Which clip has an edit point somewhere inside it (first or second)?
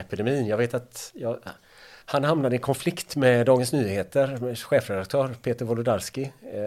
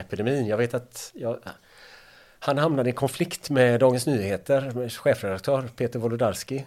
first